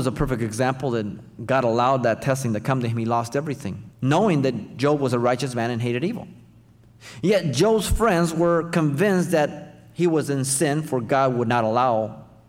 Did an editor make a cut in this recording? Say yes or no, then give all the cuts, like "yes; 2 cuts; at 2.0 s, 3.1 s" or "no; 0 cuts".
yes; 1 cut; at 3.9 s